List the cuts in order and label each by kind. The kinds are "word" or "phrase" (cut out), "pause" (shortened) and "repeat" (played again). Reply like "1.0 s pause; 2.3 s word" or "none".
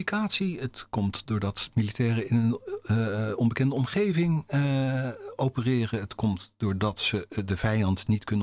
none